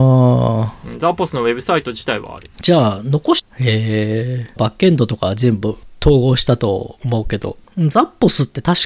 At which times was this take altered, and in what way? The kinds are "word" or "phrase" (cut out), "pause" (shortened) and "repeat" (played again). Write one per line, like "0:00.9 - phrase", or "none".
0:02.5 - pause
0:04.6 - phrase

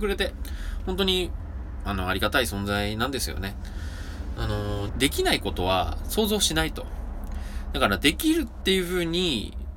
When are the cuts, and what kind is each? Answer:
0:04.9 - phrase

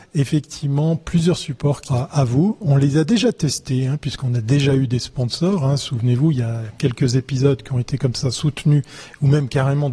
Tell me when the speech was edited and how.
0:01.9 - word

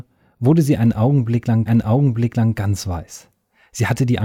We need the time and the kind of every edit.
0:01.7 - repeat

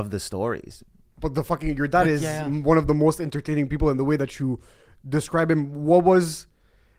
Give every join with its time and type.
none

